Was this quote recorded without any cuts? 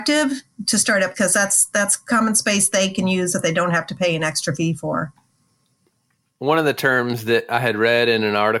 no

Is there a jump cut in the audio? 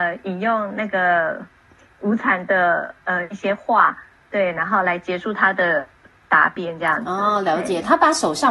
no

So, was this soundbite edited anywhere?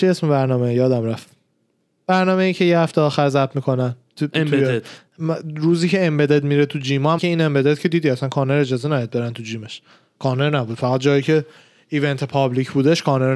yes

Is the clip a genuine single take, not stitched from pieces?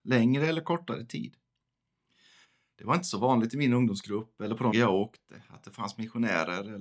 no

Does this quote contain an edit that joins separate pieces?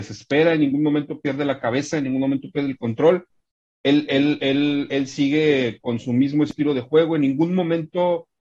no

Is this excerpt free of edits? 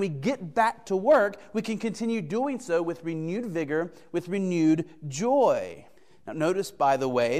no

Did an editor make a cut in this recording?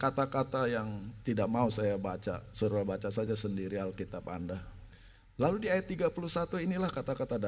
no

